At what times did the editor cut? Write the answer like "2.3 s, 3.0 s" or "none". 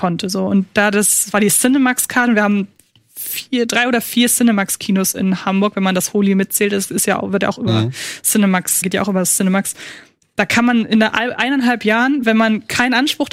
8.8 s